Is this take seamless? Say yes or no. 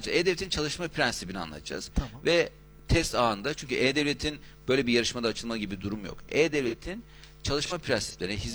yes